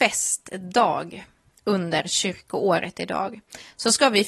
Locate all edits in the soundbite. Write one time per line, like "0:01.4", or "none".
none